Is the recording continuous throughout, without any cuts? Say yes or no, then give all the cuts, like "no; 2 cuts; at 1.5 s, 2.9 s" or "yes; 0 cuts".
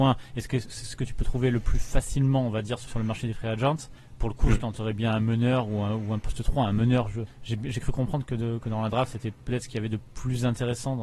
no; 1 cut; at 2.9 s